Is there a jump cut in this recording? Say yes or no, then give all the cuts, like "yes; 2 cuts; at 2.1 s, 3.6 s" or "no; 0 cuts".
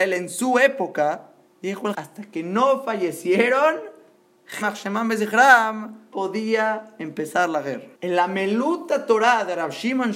yes; 5 cuts; at 1.5 s, 1.9 s, 4.6 s, 6.1 s, 7.9 s